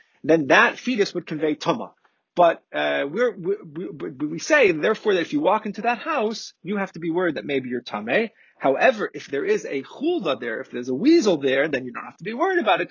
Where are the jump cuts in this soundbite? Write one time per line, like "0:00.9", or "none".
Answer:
none